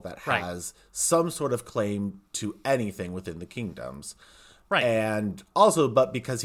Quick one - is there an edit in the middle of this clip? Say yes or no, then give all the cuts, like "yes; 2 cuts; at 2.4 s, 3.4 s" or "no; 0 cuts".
no; 0 cuts